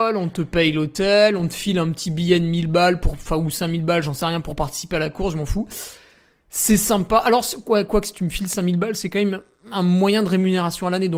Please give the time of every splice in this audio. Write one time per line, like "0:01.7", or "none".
none